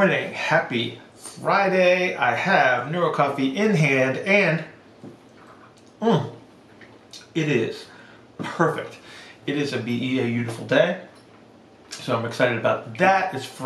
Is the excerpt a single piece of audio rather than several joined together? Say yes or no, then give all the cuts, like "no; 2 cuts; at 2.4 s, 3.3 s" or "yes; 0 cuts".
yes; 0 cuts